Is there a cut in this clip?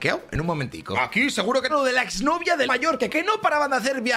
yes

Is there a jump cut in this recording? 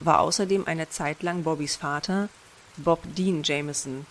no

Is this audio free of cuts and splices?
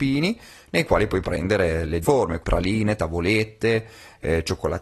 no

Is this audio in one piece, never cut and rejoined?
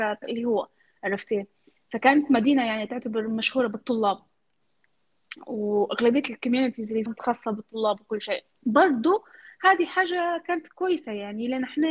no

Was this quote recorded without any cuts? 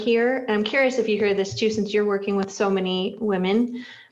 yes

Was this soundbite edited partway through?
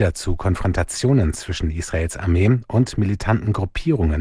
no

